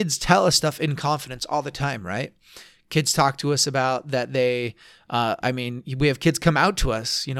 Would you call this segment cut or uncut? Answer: uncut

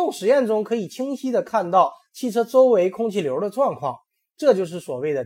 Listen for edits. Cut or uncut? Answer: uncut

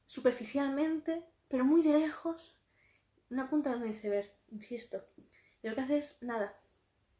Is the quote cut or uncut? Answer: uncut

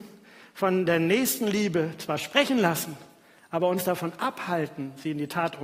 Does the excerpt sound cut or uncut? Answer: uncut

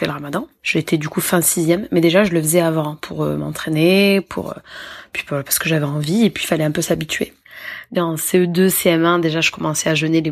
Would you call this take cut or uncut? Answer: uncut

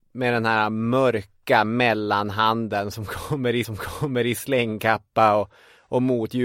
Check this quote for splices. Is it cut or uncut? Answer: cut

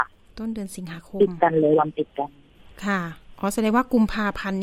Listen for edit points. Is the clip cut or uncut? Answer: cut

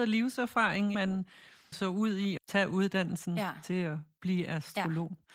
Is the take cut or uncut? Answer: cut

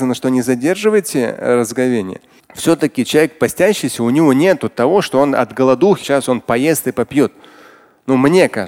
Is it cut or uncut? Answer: cut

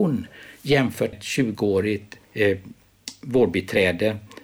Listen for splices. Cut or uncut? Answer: cut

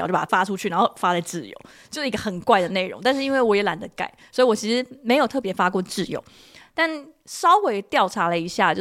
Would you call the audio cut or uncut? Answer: uncut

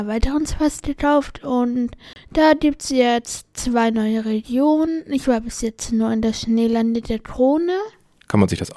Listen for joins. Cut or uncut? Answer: uncut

